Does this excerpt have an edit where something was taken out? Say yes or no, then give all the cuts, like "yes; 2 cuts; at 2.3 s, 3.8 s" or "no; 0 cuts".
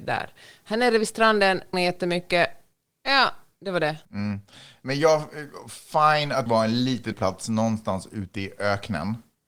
yes; 4 cuts; at 1.7 s, 4.0 s, 6.5 s, 7.1 s